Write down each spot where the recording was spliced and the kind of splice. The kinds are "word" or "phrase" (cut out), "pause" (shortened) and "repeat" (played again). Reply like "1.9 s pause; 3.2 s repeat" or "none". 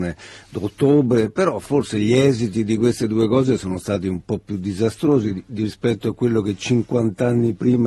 none